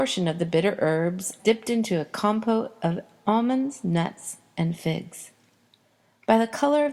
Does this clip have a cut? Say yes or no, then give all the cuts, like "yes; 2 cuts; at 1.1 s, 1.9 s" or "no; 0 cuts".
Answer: yes; 1 cut; at 1.4 s